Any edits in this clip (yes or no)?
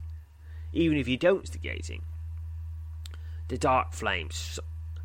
yes